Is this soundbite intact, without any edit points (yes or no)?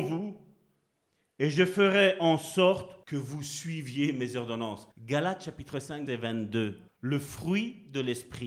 no